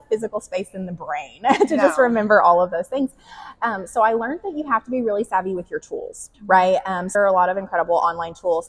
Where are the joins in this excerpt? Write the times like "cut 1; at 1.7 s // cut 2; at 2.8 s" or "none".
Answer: cut 1; at 6.3 s // cut 2; at 7.1 s